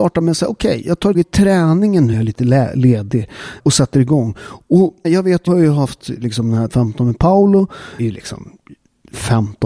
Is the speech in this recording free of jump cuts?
no; 7 cuts; at 1.1 s, 2.1 s, 3.6 s, 5.0 s, 5.5 s, 6.7 s, 8.0 s

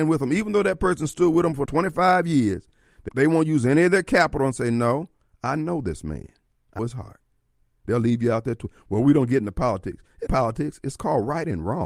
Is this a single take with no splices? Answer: no; 4 cuts; at 1.7 s, 3.1 s, 6.8 s, 10.3 s

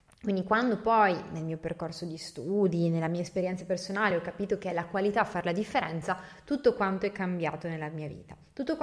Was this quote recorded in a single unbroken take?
yes; 0 cuts

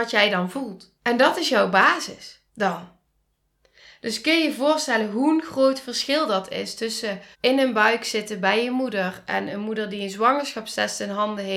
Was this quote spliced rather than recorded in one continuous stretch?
yes; 3 cuts; at 1.0 s, 2.5 s, 7.3 s

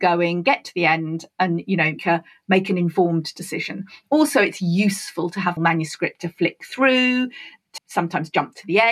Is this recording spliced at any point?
yes; 3 cuts; at 2.0 s, 5.6 s, 7.8 s

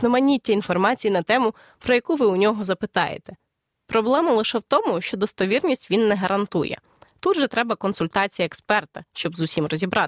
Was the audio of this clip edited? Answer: no; 0 cuts

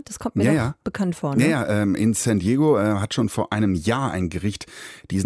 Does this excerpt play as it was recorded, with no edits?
yes; 0 cuts

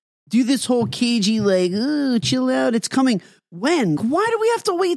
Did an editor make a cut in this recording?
yes; 1 cut; at 4.0 s

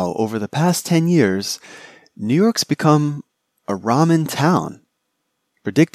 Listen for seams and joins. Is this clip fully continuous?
yes; 0 cuts

